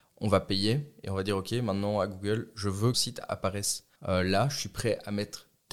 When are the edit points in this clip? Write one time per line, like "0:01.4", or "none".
0:02.9
0:04.0